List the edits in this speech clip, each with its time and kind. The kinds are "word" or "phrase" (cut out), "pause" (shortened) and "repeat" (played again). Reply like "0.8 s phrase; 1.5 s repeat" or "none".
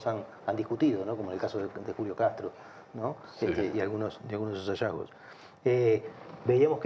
none